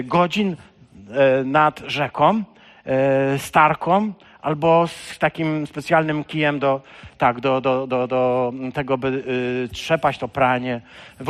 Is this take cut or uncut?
uncut